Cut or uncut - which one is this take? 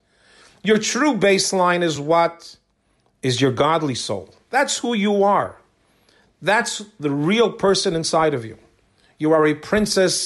uncut